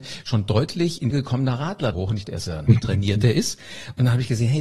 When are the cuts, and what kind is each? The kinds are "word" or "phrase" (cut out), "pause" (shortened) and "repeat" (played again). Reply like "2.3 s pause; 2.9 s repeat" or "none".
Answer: 1.1 s word; 1.9 s word; 2.2 s word; 2.7 s word